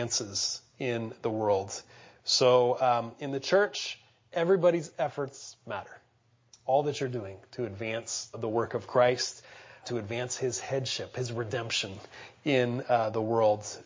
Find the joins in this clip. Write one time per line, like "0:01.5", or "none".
0:08.3
0:09.8